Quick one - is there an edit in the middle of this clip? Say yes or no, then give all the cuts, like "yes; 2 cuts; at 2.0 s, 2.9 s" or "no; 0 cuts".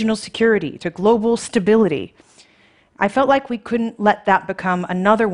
no; 0 cuts